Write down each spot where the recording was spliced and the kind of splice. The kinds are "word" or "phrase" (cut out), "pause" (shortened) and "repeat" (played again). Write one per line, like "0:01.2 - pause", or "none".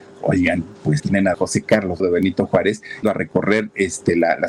0:01.0 - word
0:01.3 - word
0:02.0 - word
0:03.0 - word